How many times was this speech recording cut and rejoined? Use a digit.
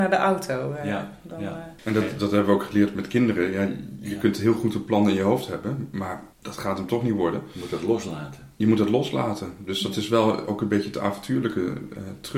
2